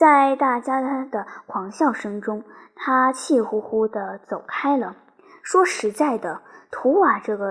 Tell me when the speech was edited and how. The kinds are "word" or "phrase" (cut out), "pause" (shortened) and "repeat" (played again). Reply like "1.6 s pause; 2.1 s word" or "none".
none